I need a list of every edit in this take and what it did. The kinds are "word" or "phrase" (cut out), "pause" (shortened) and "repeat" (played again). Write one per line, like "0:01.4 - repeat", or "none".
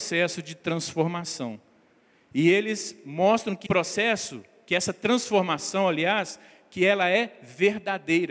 0:03.7 - word